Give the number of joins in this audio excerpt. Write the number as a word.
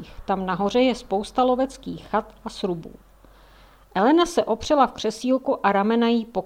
zero